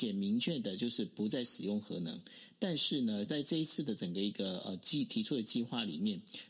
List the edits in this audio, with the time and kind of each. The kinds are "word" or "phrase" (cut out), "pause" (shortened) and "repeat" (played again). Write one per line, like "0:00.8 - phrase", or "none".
0:03.3 - phrase

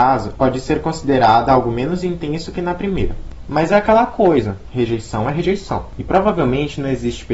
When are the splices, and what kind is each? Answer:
none

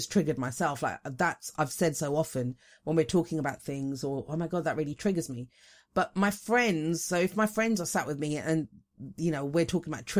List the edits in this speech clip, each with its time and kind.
none

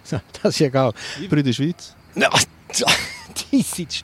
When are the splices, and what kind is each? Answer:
0:01.3 - phrase

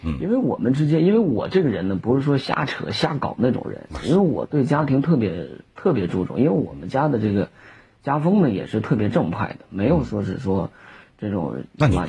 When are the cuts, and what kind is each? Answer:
none

